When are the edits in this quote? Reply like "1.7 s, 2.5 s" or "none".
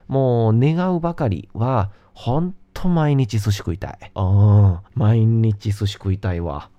2.6 s, 4.1 s, 4.9 s